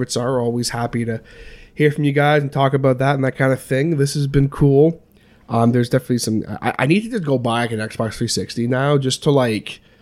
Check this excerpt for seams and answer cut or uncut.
uncut